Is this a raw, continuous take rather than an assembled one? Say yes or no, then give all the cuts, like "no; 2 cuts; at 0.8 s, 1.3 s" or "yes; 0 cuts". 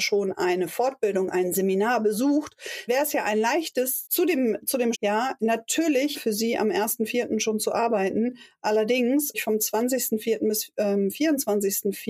no; 5 cuts; at 2.9 s, 4.0 s, 4.9 s, 6.1 s, 9.3 s